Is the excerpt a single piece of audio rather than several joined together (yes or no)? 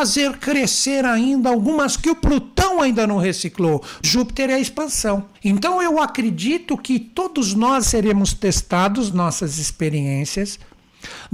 no